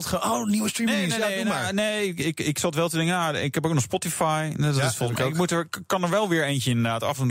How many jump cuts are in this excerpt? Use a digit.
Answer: 0